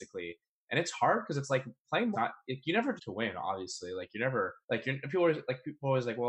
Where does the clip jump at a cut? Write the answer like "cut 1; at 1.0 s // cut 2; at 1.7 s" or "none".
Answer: cut 1; at 2.1 s // cut 2; at 3.0 s // cut 3; at 4.6 s